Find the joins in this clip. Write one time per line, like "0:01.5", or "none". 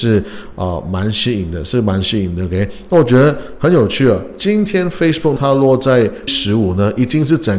0:05.4
0:06.3